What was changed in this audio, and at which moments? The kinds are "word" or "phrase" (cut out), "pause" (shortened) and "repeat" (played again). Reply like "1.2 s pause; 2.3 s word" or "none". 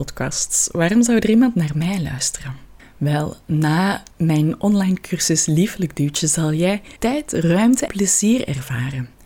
2.8 s pause; 4.1 s pause; 7.0 s pause; 7.9 s word